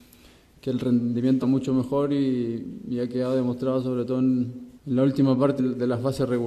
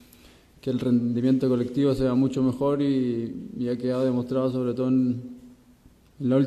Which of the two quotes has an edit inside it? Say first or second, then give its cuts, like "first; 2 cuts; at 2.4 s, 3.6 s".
first; 3 cuts; at 1.4 s, 4.7 s, 5.6 s